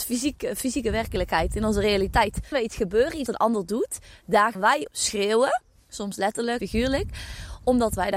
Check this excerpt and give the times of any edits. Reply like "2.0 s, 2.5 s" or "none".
2.5 s, 3.3 s, 4.5 s, 4.9 s, 6.6 s